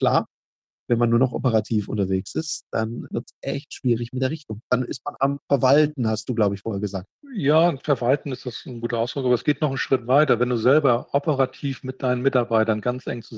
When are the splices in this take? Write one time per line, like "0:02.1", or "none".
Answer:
0:04.6
0:05.4